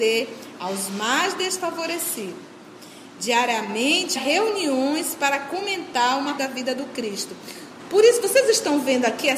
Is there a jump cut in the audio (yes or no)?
yes